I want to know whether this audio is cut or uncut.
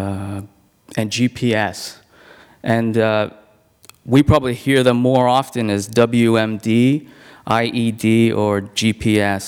uncut